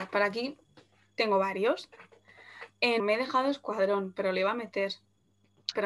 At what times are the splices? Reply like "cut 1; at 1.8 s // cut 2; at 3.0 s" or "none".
cut 1; at 3.0 s